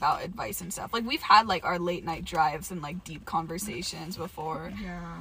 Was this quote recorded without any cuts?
yes; 0 cuts

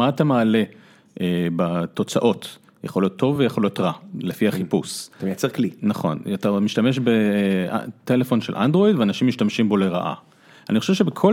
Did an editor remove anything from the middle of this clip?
no; 0 cuts

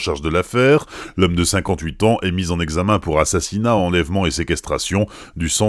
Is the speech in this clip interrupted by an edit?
no; 0 cuts

